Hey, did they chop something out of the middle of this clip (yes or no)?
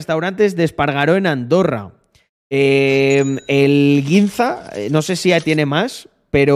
no